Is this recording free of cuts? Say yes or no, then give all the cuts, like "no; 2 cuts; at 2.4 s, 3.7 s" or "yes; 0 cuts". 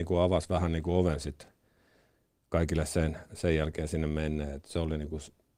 yes; 0 cuts